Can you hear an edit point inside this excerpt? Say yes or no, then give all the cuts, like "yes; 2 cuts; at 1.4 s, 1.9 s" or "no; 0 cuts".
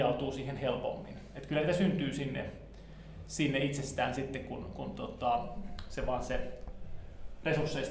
no; 0 cuts